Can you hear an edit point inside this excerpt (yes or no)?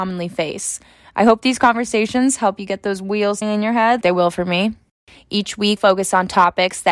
yes